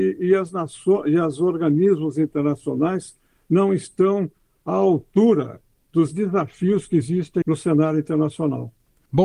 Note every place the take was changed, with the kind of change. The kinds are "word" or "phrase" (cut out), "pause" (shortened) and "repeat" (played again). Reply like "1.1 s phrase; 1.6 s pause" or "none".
7.4 s word